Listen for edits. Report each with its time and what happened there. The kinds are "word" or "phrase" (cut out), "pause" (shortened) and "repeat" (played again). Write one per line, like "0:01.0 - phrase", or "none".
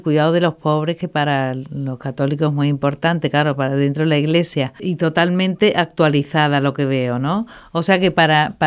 none